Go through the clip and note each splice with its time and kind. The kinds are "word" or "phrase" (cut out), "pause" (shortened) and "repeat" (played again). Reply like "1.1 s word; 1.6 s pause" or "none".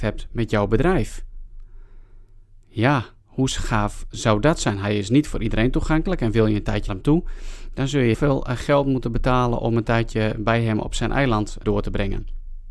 4.1 s word; 6.9 s word; 8.1 s word; 11.6 s word